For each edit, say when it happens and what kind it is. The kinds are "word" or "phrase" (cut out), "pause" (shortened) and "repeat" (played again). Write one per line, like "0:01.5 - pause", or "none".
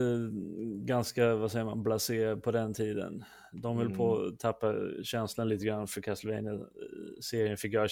none